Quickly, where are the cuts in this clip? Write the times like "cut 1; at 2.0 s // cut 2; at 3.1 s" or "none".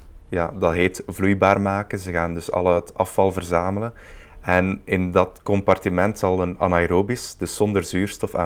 none